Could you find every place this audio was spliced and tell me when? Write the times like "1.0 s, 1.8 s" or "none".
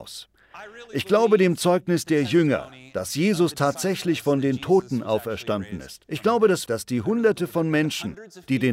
6.7 s